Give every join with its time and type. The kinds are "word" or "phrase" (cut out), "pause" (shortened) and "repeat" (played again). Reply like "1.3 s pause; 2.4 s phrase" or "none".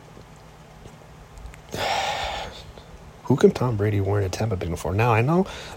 3.5 s word; 4.6 s word